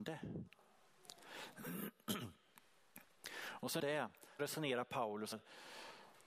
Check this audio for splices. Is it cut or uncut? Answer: cut